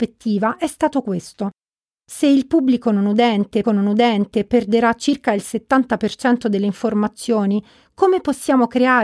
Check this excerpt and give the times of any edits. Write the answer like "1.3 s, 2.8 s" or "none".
3.6 s